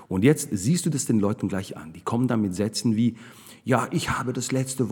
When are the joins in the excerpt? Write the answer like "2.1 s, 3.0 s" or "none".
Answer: none